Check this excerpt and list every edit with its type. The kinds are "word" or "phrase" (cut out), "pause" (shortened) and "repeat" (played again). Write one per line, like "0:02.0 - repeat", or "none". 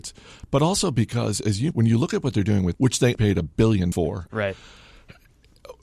0:01.7 - phrase
0:02.7 - word
0:03.1 - word
0:03.9 - word